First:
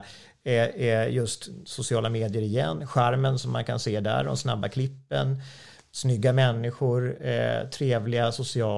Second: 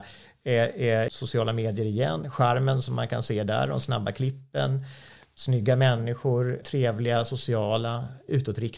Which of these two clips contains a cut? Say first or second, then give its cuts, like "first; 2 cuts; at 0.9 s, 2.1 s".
second; 2 cuts; at 1.1 s, 6.6 s